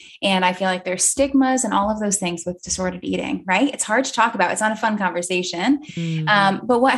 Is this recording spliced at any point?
no; 0 cuts

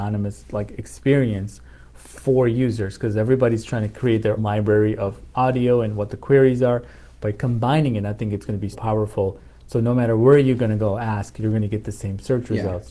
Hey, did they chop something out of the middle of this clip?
yes; 3 cuts; at 4.4 s, 5.3 s, 8.7 s

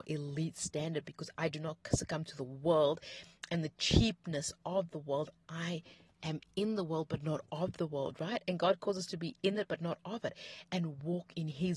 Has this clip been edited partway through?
no; 0 cuts

